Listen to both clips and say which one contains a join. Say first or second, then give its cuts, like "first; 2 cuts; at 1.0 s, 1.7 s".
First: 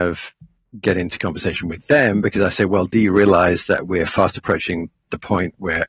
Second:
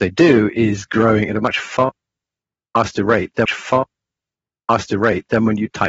second; 1 cut; at 3.5 s